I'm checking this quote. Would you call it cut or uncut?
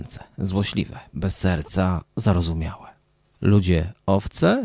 uncut